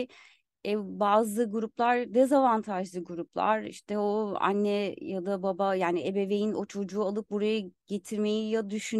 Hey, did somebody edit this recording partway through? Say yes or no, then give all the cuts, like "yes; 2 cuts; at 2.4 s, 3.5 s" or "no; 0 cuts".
no; 0 cuts